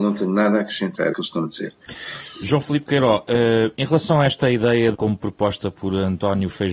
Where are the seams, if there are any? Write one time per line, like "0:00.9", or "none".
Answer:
0:01.1
0:04.9